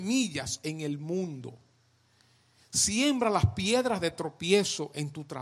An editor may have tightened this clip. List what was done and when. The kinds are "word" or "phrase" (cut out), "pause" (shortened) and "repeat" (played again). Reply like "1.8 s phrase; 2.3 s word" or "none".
none